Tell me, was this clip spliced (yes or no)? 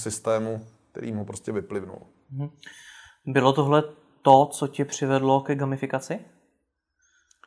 no